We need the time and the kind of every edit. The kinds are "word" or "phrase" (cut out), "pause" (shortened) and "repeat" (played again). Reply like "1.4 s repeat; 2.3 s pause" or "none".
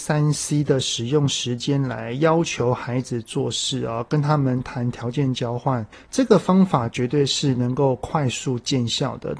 5.9 s pause